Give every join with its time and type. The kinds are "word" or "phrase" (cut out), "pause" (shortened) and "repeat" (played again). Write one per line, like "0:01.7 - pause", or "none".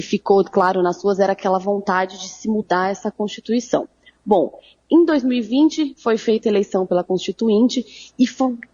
none